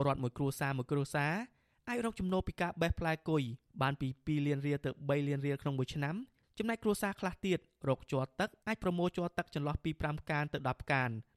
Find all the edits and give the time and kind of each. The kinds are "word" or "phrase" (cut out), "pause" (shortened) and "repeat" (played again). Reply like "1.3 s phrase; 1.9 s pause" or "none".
none